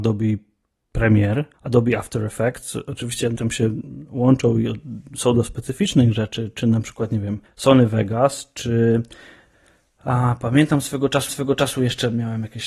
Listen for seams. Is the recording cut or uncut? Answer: cut